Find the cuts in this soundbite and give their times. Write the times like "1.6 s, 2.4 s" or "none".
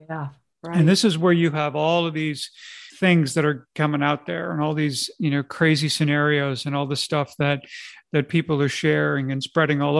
2.9 s